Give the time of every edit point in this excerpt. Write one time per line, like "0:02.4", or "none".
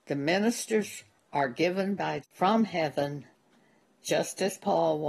0:02.2